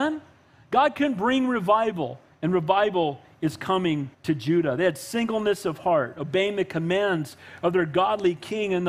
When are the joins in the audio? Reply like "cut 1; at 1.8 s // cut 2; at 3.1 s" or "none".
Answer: cut 1; at 4.1 s